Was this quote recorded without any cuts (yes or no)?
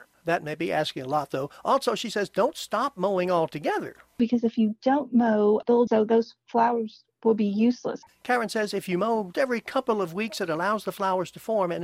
no